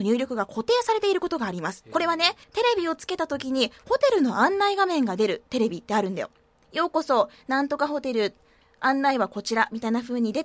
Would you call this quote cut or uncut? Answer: cut